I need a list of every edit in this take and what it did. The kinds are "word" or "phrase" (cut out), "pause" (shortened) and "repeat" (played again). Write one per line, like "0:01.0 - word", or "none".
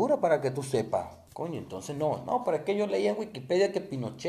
0:01.3 - pause